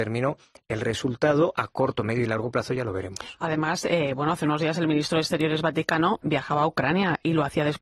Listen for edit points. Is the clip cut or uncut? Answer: uncut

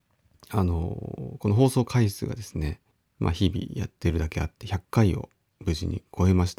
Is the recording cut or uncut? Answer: cut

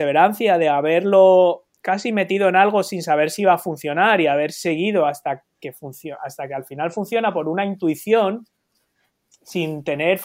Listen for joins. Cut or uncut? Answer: uncut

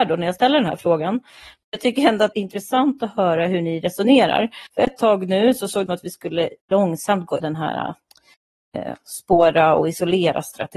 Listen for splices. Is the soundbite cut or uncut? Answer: cut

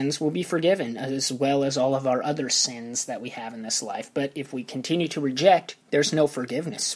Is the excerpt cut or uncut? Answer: cut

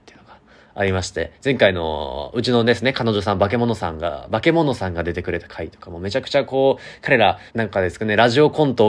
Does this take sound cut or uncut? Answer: cut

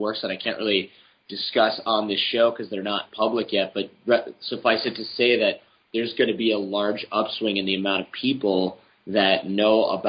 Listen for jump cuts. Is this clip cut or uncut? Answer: uncut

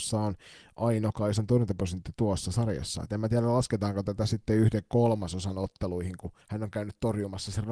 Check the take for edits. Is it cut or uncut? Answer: cut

